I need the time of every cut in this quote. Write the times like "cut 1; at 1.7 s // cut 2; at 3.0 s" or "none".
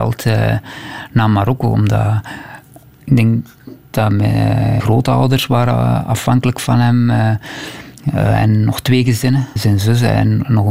cut 1; at 4.8 s // cut 2; at 8.0 s // cut 3; at 9.6 s